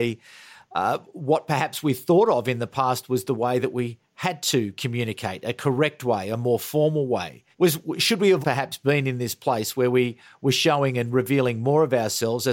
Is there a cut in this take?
yes; 2 cuts; at 7.5 s, 8.4 s

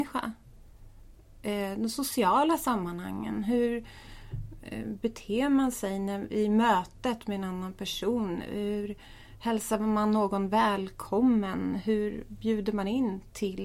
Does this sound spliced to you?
no; 0 cuts

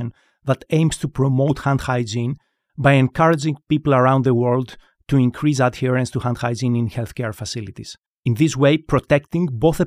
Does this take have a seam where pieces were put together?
no; 0 cuts

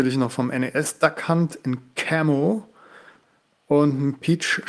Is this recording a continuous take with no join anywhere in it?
yes; 0 cuts

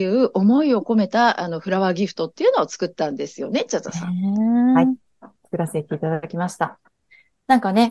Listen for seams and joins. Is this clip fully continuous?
yes; 0 cuts

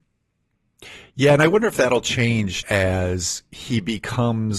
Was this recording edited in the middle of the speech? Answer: yes; 1 cut; at 2.6 s

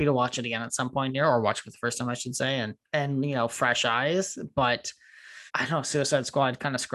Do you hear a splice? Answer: yes; 2 cuts; at 2.8 s, 5.5 s

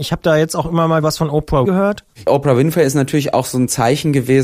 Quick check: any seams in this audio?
yes; 2 cuts; at 1.0 s, 1.6 s

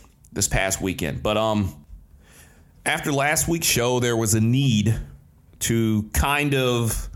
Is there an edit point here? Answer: no; 0 cuts

